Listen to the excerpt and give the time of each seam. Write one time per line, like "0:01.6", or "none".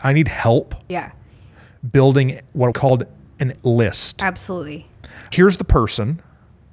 0:02.7
0:03.6
0:05.3